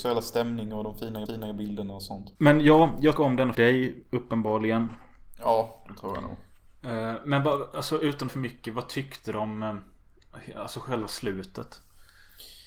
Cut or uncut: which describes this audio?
cut